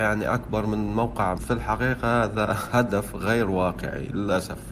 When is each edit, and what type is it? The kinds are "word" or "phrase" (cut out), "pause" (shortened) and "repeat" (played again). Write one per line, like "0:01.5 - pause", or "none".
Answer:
0:01.3 - word